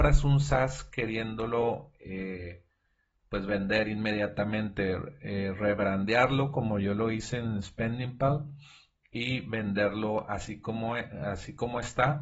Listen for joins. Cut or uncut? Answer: uncut